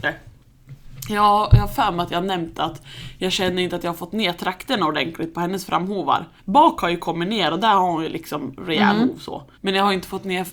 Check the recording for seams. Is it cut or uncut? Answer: cut